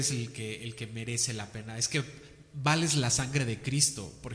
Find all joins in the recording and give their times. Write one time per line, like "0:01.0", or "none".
none